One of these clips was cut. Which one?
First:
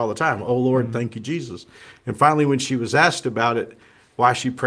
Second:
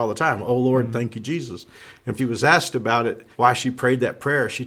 second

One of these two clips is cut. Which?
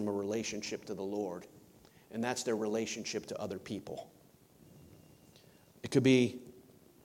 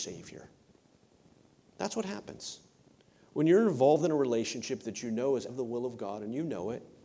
second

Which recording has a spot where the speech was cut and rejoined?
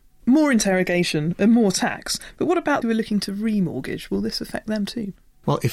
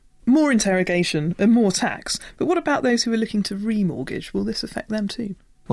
first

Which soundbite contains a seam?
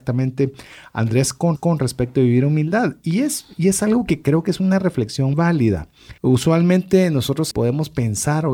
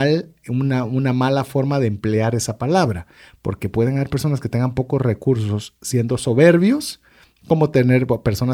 first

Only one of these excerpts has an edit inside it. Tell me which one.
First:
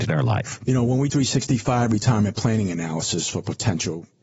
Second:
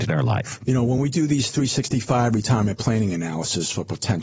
first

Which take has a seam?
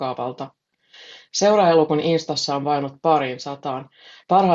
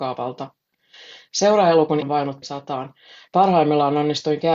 second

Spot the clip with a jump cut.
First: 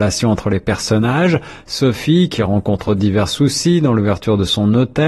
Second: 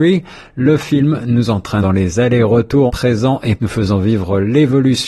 second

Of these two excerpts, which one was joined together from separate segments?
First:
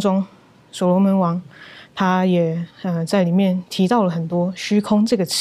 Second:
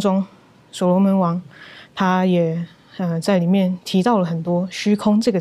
first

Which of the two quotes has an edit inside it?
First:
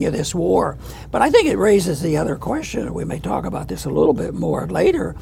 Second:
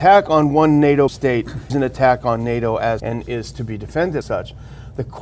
second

